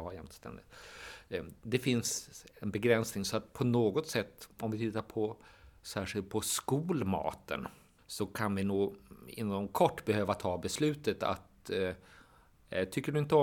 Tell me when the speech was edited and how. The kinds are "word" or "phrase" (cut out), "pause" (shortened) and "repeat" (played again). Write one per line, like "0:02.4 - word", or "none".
none